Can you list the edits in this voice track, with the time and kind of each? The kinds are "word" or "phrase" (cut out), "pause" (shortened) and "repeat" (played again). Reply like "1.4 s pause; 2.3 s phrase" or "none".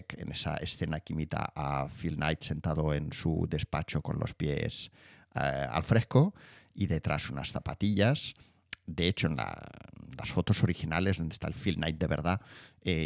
none